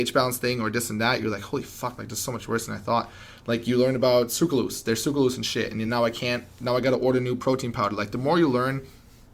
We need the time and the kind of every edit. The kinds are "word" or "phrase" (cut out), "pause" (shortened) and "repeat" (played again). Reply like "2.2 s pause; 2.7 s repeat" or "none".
none